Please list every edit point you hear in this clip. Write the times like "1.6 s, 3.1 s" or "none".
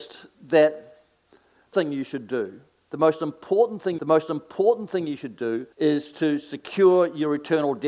1.7 s, 4.0 s, 5.7 s